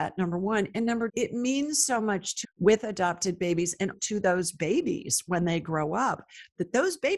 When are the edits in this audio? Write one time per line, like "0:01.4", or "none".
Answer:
0:01.1
0:02.4
0:03.9